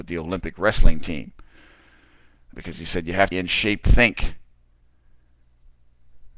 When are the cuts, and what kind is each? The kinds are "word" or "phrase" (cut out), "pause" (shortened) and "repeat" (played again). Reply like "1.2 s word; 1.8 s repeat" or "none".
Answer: 2.5 s word; 3.3 s word; 3.8 s word